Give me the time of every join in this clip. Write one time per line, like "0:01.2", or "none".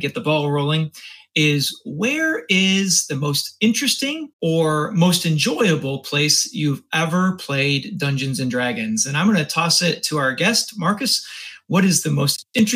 0:04.3